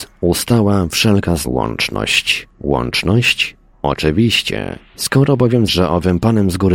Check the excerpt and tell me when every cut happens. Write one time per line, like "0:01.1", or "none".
0:01.5
0:02.5
0:05.7